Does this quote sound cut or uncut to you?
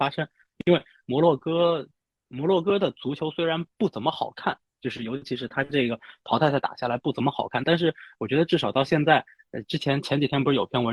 uncut